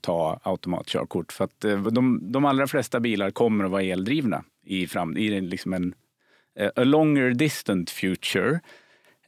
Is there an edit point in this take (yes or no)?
no